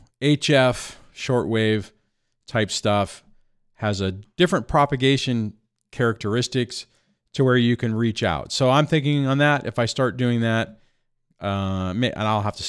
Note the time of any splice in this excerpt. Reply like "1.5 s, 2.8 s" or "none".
none